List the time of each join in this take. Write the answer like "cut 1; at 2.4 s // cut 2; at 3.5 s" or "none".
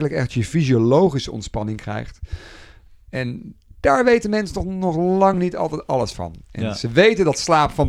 none